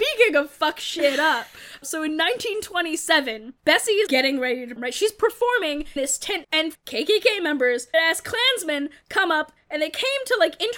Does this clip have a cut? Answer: yes; 8 cuts; at 1.8 s, 3.6 s, 4.1 s, 4.8 s, 6.0 s, 6.4 s, 6.7 s, 7.9 s

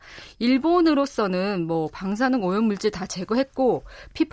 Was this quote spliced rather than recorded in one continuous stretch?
no; 0 cuts

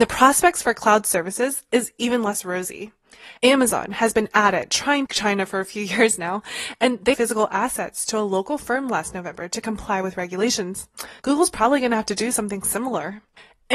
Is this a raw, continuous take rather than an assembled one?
no; 4 cuts; at 3.4 s, 5.1 s, 7.1 s, 11.2 s

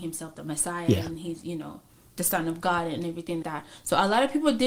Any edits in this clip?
yes; 2 cuts; at 2.1 s, 3.4 s

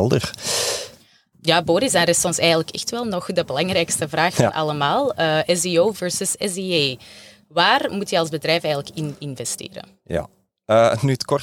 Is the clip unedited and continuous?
yes; 0 cuts

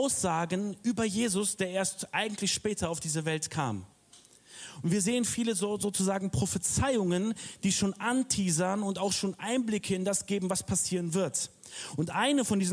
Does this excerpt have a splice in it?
no; 0 cuts

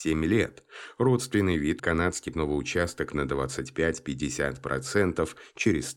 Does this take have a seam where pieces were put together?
yes; 2 cuts; at 1.8 s, 2.3 s

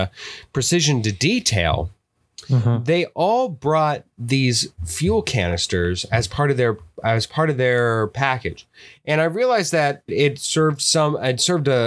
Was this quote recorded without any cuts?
no; 1 cut; at 10.1 s

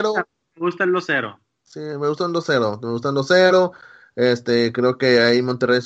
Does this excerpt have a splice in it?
no; 0 cuts

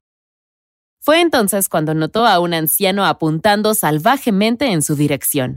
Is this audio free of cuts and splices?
yes; 0 cuts

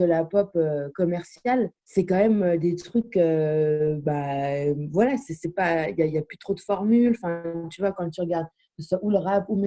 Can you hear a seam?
yes; 1 cut; at 1.8 s

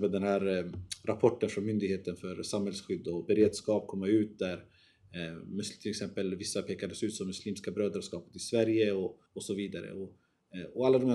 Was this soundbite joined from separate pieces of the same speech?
yes; 1 cut; at 9.3 s

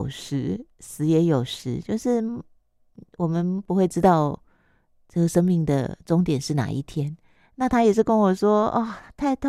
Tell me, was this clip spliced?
no; 0 cuts

